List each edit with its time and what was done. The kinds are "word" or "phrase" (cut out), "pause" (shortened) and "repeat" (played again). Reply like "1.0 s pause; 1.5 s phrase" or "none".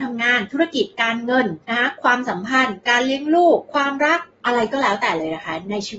1.6 s pause